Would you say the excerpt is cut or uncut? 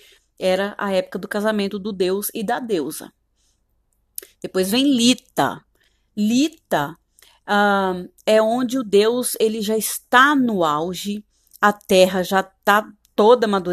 uncut